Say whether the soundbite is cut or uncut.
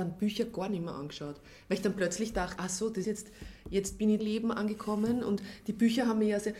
cut